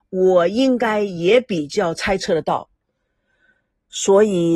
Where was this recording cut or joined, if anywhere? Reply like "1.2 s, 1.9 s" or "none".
none